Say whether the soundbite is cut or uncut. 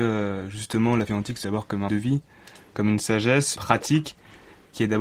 cut